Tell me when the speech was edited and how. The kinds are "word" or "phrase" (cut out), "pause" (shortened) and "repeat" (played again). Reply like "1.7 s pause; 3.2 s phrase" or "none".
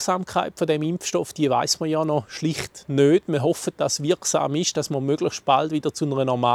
none